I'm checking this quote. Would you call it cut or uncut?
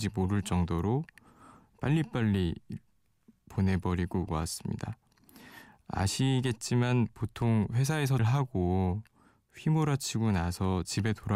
cut